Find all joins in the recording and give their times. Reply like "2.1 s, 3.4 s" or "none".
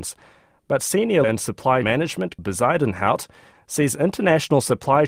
1.2 s, 1.8 s, 2.4 s